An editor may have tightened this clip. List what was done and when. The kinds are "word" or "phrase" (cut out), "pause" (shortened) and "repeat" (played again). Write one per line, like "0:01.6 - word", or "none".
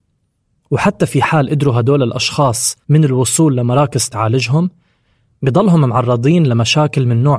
0:02.8 - pause
0:04.1 - phrase